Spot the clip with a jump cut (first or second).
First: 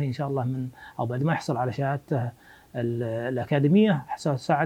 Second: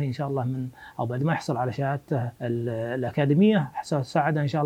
second